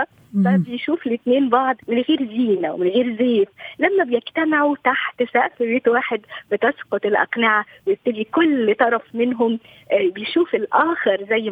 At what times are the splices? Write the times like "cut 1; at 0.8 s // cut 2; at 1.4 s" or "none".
cut 1; at 1.8 s